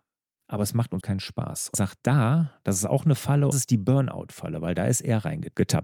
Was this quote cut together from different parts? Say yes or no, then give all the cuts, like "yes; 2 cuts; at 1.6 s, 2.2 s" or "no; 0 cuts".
yes; 3 cuts; at 1.0 s, 1.7 s, 3.5 s